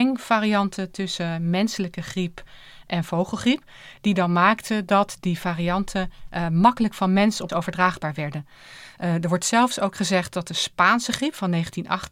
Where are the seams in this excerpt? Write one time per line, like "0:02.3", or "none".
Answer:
0:07.5